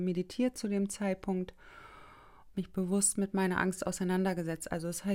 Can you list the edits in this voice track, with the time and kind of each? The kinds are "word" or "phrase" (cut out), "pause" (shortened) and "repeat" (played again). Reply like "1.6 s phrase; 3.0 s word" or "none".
2.5 s phrase